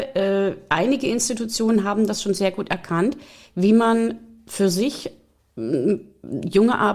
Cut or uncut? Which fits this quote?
uncut